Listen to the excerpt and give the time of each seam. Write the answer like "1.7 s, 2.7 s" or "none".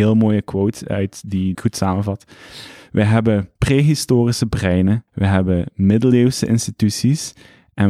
1.5 s, 3.6 s, 5.1 s